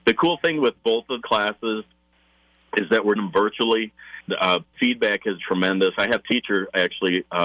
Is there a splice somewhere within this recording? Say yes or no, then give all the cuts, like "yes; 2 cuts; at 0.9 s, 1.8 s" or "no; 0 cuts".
yes; 6 cuts; at 1.2 s, 3.2 s, 4.3 s, 4.7 s, 5.4 s, 6.2 s